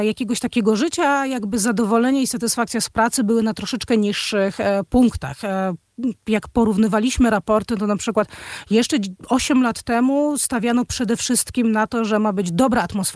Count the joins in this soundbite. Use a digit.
0